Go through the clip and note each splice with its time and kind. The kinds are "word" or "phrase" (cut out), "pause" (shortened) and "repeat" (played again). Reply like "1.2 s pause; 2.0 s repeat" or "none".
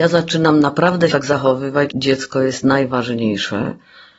1.1 s word; 1.9 s word